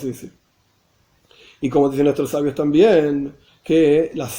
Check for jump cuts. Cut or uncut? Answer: uncut